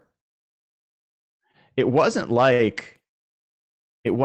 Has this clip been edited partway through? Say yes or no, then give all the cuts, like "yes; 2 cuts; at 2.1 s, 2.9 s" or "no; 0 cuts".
no; 0 cuts